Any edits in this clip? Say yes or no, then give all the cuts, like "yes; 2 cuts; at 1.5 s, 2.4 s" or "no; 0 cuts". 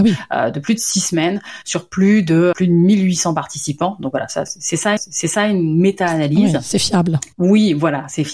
yes; 3 cuts; at 2.5 s, 5.0 s, 7.3 s